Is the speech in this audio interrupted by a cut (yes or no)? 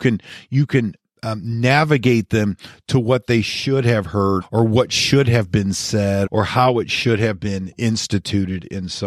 yes